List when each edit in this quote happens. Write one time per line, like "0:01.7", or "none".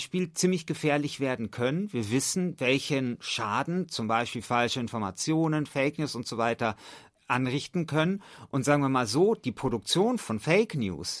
none